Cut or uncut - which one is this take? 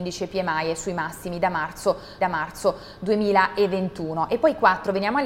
cut